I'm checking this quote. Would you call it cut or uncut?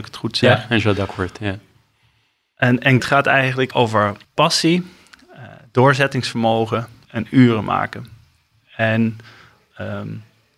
cut